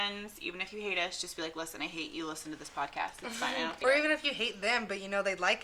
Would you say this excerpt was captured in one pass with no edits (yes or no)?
no